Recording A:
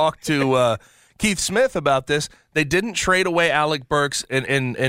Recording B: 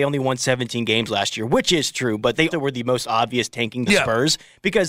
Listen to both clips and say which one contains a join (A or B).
B